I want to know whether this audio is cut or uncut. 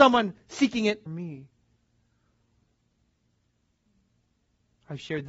cut